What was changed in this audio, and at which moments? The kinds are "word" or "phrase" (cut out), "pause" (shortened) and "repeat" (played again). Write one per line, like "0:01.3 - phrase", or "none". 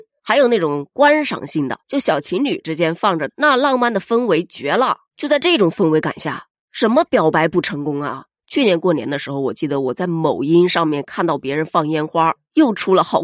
0:01.8 - pause